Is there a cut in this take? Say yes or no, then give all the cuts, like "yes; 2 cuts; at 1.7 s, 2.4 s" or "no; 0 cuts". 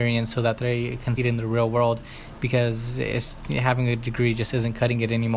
yes; 1 cut; at 1.2 s